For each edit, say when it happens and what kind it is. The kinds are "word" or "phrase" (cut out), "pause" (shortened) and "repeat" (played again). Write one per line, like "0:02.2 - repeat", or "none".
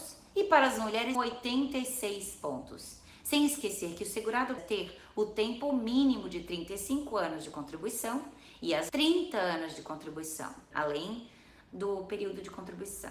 0:01.1 - word
0:04.6 - word
0:08.9 - word
0:10.7 - word